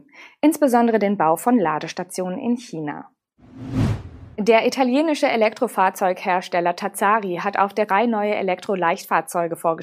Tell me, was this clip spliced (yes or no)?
yes